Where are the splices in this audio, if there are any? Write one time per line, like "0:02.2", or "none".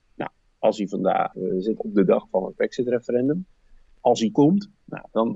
0:01.3
0:01.8
0:04.3